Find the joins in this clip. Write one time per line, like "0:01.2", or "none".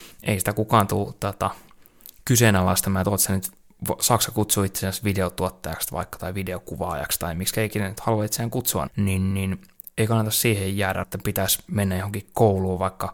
0:08.9
0:09.3
0:11.0